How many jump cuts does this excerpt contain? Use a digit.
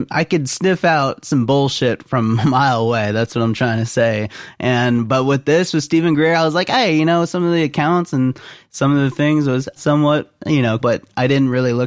2